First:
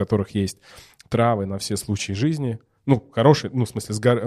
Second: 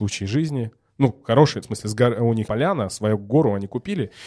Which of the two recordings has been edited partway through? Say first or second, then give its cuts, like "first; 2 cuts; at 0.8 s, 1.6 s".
second; 2 cuts; at 1.6 s, 2.5 s